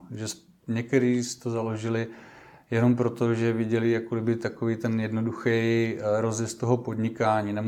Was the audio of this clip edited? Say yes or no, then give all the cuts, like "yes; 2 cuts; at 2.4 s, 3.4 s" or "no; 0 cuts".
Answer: no; 0 cuts